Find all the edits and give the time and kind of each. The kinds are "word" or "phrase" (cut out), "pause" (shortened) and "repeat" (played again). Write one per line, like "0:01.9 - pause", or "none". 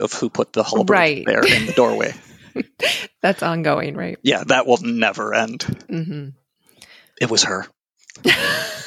none